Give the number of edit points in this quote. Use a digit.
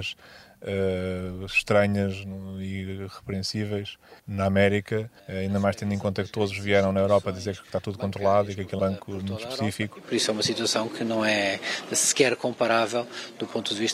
3